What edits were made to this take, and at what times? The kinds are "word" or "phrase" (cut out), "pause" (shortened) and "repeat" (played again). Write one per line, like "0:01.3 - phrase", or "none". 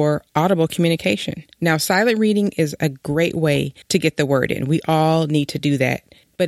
0:03.8 - pause